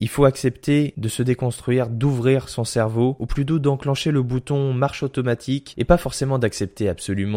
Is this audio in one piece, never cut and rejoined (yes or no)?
yes